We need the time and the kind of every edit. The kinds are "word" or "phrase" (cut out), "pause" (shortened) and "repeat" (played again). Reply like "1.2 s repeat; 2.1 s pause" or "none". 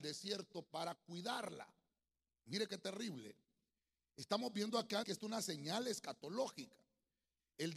5.0 s word